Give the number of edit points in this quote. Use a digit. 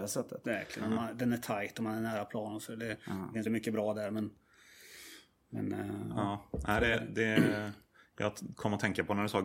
1